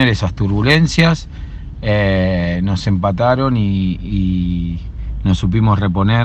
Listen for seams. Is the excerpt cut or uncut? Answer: uncut